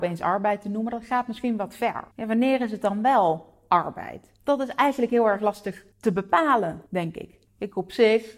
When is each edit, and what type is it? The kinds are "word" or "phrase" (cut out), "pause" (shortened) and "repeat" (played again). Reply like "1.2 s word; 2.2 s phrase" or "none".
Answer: 2.1 s pause; 4.4 s pause; 5.9 s pause; 6.9 s pause; 7.5 s pause